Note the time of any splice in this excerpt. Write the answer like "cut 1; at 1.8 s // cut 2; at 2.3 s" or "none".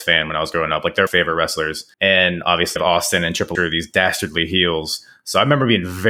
cut 1; at 1.1 s // cut 2; at 1.9 s // cut 3; at 2.8 s // cut 4; at 3.5 s